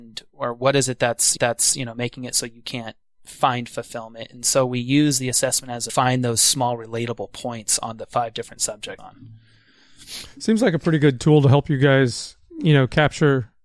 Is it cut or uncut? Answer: cut